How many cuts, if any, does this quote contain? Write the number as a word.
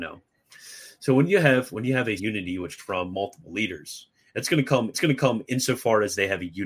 three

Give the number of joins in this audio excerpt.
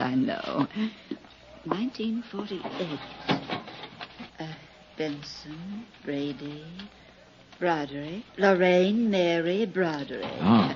three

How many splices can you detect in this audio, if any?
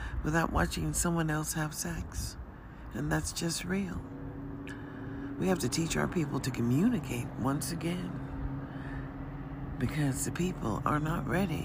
zero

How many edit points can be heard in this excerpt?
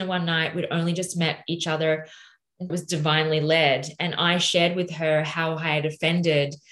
one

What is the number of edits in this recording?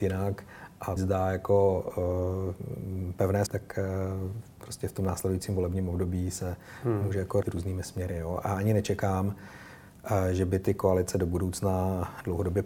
three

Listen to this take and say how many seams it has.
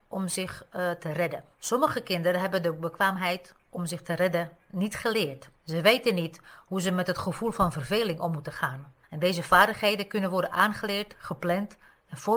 three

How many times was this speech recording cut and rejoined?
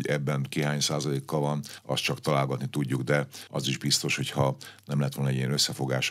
zero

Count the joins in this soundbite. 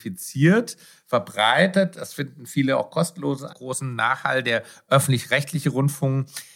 one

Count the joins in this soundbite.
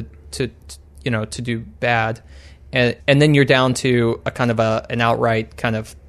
one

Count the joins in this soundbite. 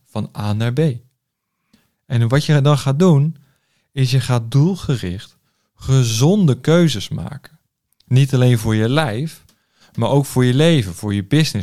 zero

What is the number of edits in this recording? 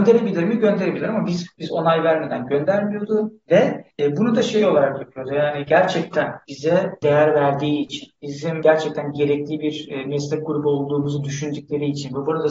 zero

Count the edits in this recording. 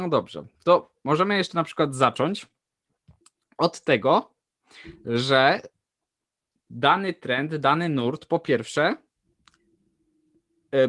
zero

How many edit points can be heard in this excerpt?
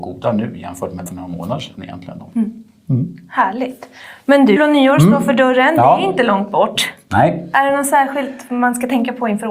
two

